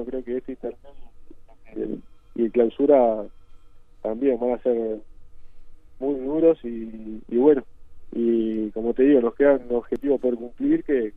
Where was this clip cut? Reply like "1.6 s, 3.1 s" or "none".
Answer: none